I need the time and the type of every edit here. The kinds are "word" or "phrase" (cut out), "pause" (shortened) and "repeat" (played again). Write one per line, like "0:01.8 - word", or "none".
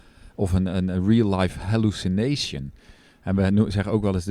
none